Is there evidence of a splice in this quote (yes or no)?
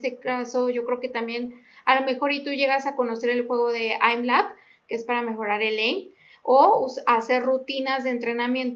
no